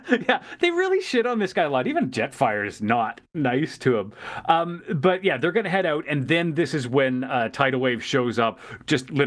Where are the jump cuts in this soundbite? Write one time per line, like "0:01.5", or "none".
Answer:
none